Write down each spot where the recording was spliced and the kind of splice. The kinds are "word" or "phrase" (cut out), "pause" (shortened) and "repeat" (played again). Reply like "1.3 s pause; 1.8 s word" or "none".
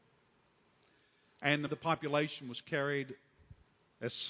1.7 s word